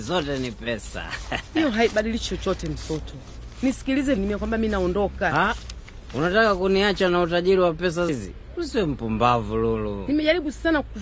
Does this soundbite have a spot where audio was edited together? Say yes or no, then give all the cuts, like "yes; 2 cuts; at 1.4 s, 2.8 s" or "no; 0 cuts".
yes; 2 cuts; at 4.2 s, 8.1 s